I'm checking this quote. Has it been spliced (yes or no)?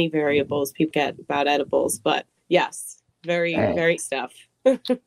yes